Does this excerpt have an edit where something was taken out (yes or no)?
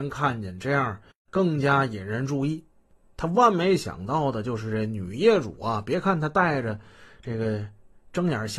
no